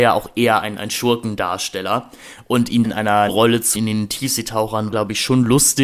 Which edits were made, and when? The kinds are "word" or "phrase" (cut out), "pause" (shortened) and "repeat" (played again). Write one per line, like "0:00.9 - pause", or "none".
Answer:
0:02.8 - phrase
0:03.3 - word
0:03.8 - word
0:04.9 - word